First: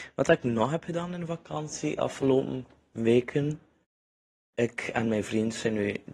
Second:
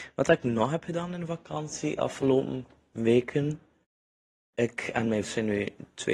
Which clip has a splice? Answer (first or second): second